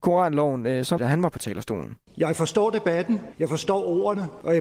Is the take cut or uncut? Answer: cut